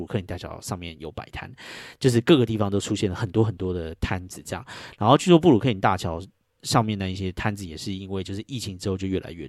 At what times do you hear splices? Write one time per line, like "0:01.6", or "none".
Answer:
none